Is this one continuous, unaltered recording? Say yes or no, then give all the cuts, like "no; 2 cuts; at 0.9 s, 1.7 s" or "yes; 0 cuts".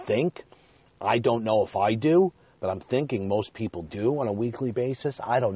yes; 0 cuts